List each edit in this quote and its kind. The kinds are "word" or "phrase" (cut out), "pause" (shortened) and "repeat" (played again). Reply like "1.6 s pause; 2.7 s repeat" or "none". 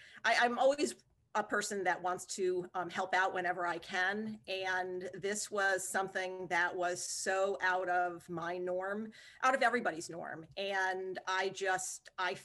none

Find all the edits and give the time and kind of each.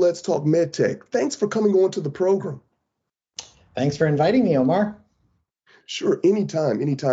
none

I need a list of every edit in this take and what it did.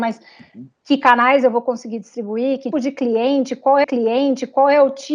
2.7 s word; 3.8 s repeat

